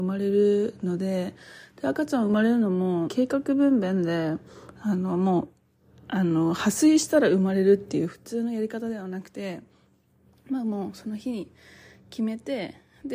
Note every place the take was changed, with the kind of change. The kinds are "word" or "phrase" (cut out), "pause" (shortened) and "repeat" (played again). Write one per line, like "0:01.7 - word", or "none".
0:03.1 - word